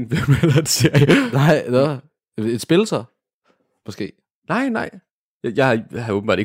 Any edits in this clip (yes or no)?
no